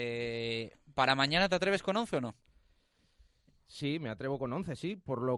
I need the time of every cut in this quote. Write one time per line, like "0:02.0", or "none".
none